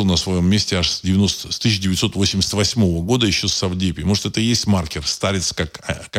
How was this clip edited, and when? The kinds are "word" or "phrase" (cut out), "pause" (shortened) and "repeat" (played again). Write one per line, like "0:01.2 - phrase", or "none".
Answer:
none